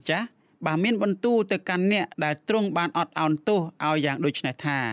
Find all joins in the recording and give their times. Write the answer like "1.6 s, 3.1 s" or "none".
2.1 s